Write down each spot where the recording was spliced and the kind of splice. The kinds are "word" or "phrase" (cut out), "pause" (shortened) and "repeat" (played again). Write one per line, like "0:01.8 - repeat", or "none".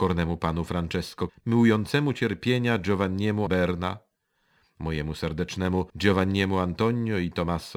0:01.3 - word
0:03.5 - word
0:05.9 - pause

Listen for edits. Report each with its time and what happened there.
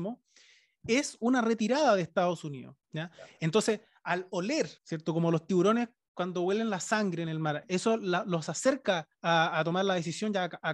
0:02.8 - pause
0:04.8 - pause
0:09.1 - pause

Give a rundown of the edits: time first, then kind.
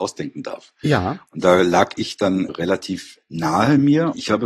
0:02.5 - word

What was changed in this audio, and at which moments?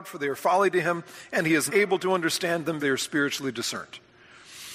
0:01.7 - word
0:02.8 - word

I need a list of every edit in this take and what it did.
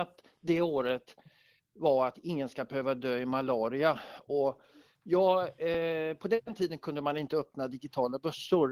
none

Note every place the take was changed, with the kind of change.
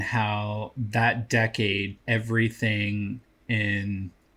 0:02.0 - word

